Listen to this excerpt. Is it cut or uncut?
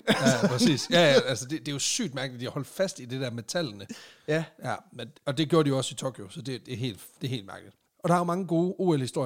cut